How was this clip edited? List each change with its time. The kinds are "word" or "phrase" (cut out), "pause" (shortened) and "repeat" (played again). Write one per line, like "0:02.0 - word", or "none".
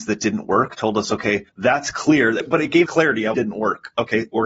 0:01.5 - pause
0:02.9 - word
0:03.3 - phrase